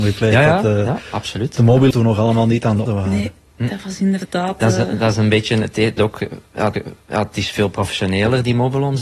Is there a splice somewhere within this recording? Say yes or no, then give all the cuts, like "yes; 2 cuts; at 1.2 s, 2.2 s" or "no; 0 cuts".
yes; 4 cuts; at 1.9 s, 2.9 s, 6.0 s, 6.7 s